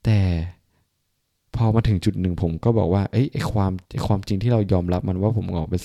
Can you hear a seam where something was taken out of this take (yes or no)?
yes